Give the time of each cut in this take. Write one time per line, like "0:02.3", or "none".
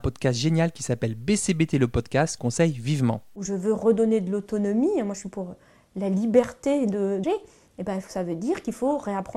0:02.4
0:07.2
0:08.1